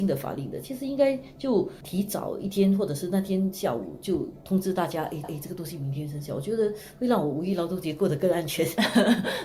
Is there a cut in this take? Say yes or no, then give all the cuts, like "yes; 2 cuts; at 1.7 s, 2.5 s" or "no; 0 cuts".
yes; 1 cut; at 5.2 s